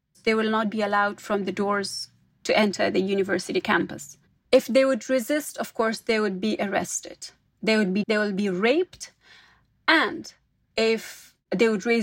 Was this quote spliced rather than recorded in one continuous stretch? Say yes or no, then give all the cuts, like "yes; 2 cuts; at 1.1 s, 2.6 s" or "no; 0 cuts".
yes; 1 cut; at 8.0 s